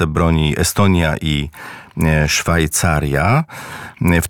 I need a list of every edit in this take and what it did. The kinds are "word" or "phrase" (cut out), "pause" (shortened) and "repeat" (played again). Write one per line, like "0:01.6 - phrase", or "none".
none